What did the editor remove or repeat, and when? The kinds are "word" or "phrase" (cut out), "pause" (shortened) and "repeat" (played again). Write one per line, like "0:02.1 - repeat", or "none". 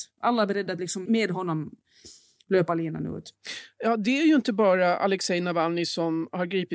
0:01.1 - word